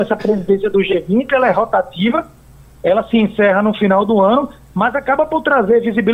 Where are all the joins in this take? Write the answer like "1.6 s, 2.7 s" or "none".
none